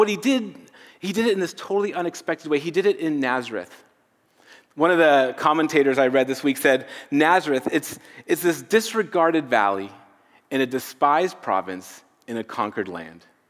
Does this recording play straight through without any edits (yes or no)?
yes